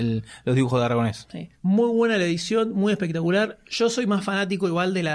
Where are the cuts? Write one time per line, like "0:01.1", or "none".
0:01.5